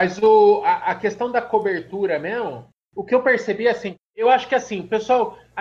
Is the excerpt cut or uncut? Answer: uncut